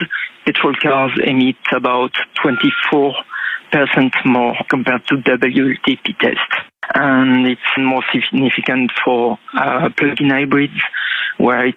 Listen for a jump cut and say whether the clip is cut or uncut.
cut